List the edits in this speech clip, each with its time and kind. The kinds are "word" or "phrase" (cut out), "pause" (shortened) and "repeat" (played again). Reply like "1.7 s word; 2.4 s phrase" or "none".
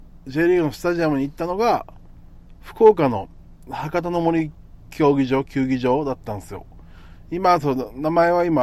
none

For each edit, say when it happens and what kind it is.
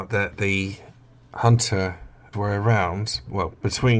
2.3 s word

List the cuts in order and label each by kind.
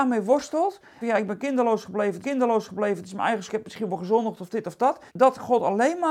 1.0 s phrase; 2.2 s repeat; 3.5 s word; 5.1 s pause

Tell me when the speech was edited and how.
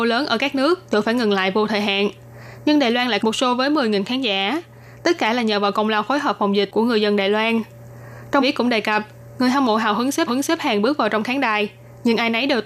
3.2 s phrase; 8.4 s word; 10.3 s repeat

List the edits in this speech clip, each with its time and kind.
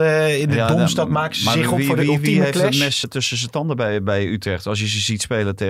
3.0 s word

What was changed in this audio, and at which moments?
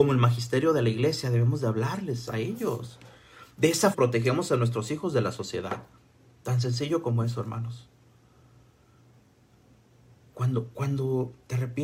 3.9 s phrase

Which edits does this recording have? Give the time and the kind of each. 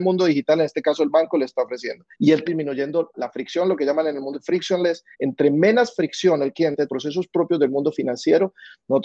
2.1 s pause; 2.4 s phrase; 3.1 s word; 4.3 s word; 5.1 s pause; 6.9 s phrase

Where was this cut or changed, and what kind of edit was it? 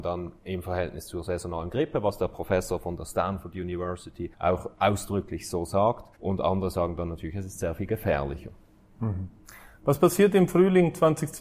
4.3 s pause; 6.2 s pause

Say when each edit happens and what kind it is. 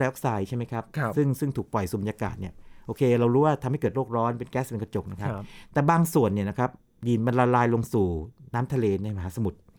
none

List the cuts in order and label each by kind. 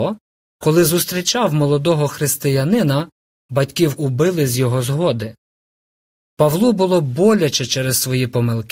4.0 s word

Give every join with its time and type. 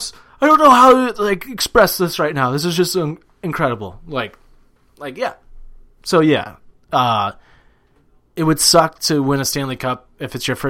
none

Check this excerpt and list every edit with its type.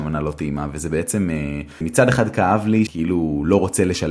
1.8 s word; 2.9 s word

